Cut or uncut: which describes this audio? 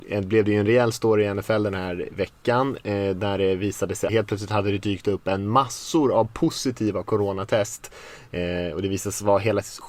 cut